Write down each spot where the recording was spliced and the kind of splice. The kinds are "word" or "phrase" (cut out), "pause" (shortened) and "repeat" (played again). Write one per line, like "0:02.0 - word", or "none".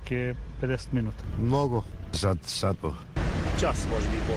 0:02.8 - word